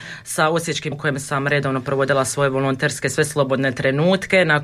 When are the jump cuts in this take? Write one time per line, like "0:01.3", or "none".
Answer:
0:00.9